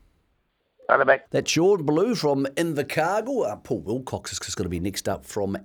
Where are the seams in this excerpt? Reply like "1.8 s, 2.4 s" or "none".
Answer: 1.3 s, 4.4 s

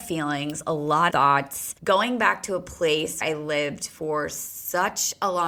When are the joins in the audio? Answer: 1.1 s, 1.8 s, 3.2 s

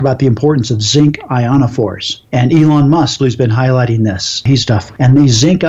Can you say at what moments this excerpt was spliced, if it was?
3.2 s, 4.6 s

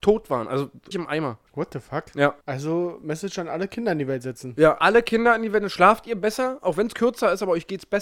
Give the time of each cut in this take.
0.9 s, 1.5 s, 2.4 s

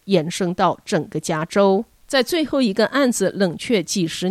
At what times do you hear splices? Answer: 2.0 s

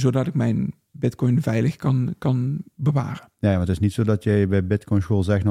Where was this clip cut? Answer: none

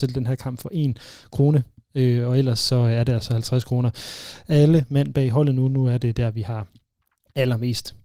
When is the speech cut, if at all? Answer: none

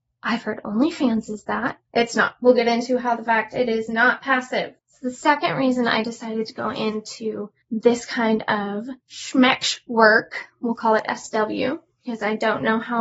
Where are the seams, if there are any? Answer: 1.8 s, 4.8 s, 7.6 s, 9.0 s

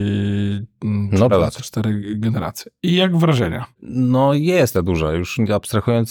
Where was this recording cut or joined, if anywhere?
1.3 s, 3.7 s, 4.7 s

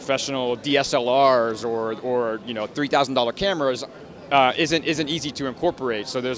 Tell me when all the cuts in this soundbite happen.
none

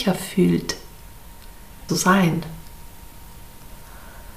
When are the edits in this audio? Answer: 1.9 s

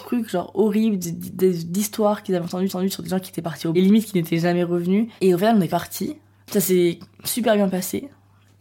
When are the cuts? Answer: 2.7 s, 3.7 s, 5.2 s, 5.7 s

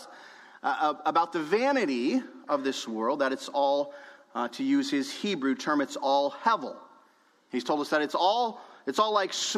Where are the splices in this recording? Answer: none

